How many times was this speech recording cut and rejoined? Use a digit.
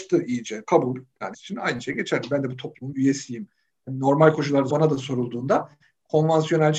3